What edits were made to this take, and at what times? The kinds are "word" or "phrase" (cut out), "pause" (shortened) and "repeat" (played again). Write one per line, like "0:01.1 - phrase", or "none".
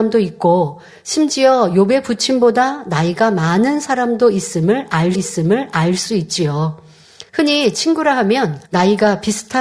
0:05.1 - repeat
0:07.3 - pause
0:08.6 - pause